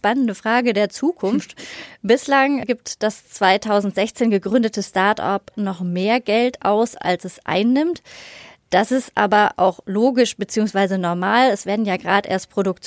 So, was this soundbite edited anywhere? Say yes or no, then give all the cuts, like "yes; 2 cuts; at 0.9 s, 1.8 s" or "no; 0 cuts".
no; 0 cuts